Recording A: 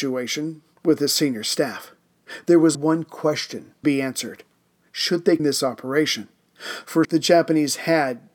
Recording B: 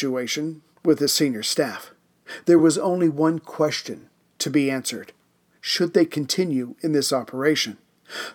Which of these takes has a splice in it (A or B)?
A